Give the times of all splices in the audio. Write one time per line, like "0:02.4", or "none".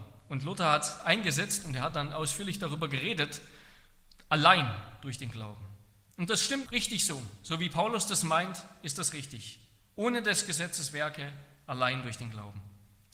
0:06.7